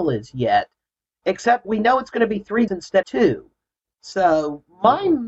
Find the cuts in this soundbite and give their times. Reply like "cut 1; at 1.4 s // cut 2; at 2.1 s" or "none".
cut 1; at 1.6 s // cut 2; at 2.7 s // cut 3; at 3.0 s